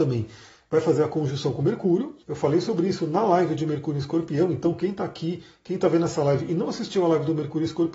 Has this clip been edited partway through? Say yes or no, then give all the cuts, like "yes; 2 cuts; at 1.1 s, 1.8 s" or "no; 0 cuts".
yes; 1 cut; at 2.2 s